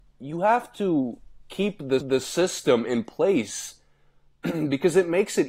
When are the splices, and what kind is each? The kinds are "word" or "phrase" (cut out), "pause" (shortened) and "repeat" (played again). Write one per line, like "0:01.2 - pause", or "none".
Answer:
0:02.0 - repeat